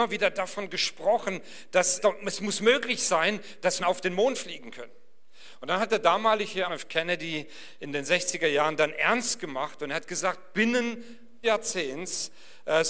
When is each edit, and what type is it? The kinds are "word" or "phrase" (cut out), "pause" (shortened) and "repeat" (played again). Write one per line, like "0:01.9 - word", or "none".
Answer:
0:02.0 - word
0:03.8 - word
0:06.7 - phrase
0:11.4 - word